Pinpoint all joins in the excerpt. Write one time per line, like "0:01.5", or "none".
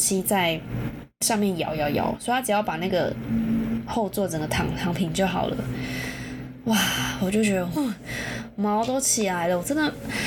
0:07.8

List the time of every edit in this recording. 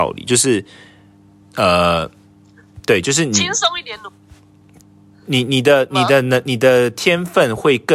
none

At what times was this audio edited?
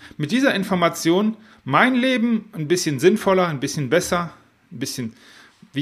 none

